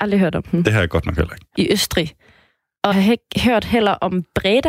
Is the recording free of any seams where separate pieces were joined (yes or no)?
no